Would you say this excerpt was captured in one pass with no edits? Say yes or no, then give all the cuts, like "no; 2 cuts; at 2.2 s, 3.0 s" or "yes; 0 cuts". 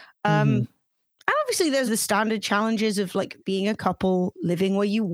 no; 1 cut; at 1.9 s